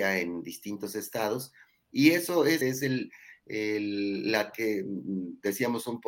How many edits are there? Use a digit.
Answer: 2